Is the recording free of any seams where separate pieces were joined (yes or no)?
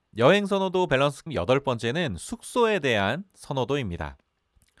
no